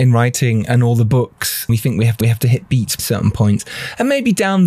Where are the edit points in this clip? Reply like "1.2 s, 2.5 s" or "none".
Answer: 1.7 s, 2.2 s, 3.0 s